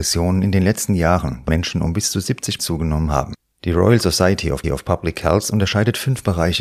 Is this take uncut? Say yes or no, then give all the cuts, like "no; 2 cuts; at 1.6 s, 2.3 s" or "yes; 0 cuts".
no; 4 cuts; at 1.5 s, 2.6 s, 3.4 s, 4.6 s